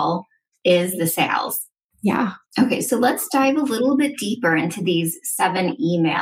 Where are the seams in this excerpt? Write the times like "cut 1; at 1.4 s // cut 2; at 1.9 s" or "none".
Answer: none